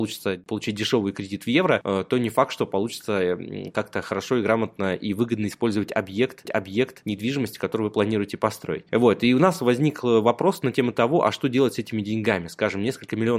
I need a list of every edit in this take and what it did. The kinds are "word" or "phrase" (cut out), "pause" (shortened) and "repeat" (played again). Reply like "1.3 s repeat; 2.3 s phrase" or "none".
6.4 s repeat